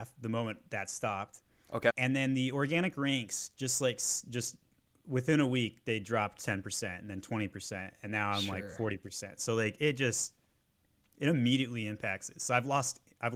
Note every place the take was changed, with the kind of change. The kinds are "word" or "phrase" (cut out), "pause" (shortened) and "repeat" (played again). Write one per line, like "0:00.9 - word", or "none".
none